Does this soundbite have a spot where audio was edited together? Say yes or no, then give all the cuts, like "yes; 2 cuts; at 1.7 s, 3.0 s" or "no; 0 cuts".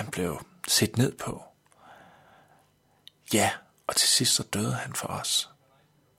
no; 0 cuts